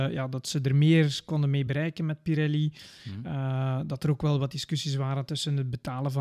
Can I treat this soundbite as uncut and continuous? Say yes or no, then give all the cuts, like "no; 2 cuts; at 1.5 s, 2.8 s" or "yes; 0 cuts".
yes; 0 cuts